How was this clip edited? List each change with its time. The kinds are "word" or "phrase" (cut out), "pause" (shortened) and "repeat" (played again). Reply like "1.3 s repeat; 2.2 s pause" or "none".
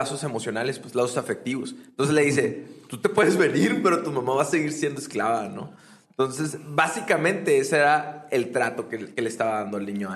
none